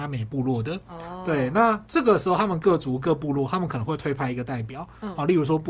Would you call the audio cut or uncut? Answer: uncut